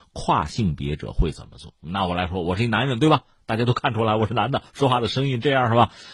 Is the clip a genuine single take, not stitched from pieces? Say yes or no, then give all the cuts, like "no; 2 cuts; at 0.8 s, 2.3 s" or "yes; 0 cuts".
yes; 0 cuts